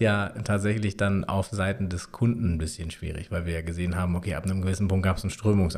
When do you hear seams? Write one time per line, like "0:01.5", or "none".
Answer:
none